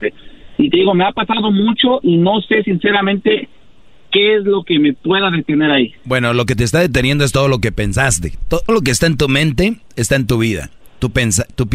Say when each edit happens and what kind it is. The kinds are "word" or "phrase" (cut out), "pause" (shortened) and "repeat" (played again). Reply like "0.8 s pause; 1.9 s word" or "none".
2.0 s word; 8.7 s word